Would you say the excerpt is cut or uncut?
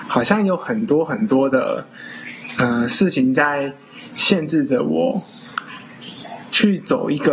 uncut